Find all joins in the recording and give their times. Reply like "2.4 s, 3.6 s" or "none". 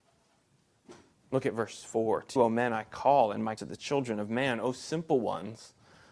1.1 s, 2.4 s, 3.6 s